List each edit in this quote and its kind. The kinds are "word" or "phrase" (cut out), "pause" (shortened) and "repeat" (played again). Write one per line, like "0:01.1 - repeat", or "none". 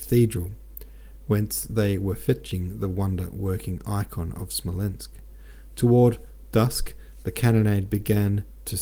none